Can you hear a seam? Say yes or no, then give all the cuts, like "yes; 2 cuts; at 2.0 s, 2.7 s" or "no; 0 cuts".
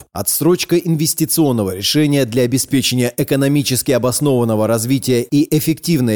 no; 0 cuts